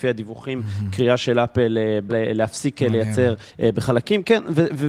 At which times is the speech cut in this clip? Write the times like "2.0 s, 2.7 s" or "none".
2.1 s, 3.5 s